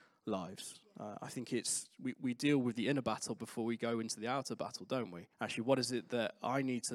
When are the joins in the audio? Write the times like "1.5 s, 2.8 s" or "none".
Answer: 5.3 s